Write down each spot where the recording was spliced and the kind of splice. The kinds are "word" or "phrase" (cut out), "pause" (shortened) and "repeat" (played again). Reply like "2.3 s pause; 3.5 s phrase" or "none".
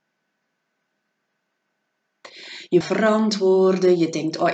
2.8 s phrase